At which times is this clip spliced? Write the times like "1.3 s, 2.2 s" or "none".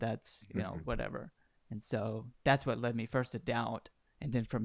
none